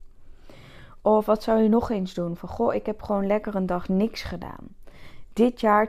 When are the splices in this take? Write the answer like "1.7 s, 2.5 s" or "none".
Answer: none